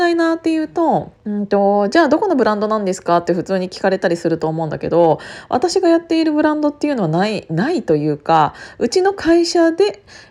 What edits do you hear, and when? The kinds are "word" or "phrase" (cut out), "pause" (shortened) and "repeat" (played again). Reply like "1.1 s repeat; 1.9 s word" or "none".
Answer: 1.2 s pause